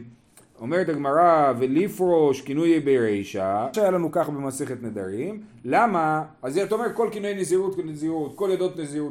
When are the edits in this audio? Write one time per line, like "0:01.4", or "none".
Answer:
0:03.7

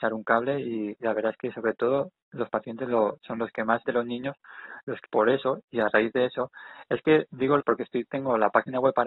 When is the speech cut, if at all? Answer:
0:03.9
0:05.1
0:07.6

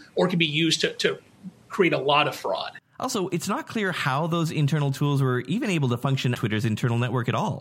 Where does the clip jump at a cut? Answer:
0:06.3

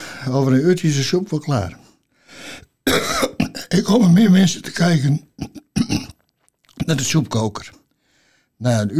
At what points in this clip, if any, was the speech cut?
none

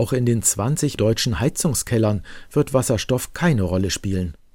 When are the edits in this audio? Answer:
0:01.0

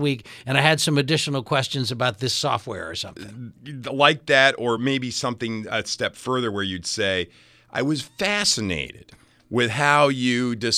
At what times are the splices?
none

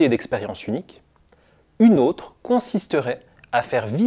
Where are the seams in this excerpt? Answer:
none

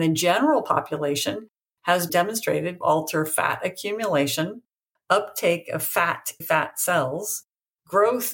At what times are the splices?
0:02.1
0:02.8
0:06.4

